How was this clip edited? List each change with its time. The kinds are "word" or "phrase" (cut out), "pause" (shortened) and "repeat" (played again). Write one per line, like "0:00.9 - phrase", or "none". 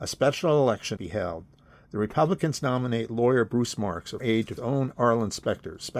0:01.0 - word
0:04.2 - word
0:04.6 - word